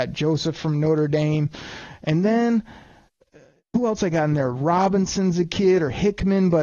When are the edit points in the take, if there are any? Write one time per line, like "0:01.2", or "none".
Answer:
none